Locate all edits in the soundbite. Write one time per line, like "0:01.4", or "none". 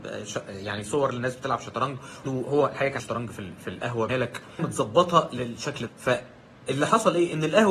0:02.2
0:03.0
0:04.1
0:04.6
0:05.9